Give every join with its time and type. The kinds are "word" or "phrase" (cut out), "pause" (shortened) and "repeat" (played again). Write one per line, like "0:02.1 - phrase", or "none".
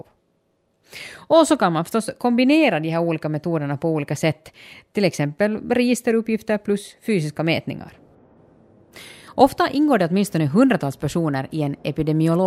none